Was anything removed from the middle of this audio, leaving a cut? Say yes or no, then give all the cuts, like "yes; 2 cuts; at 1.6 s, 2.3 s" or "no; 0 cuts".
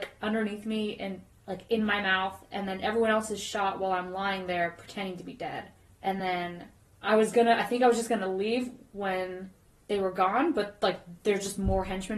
no; 0 cuts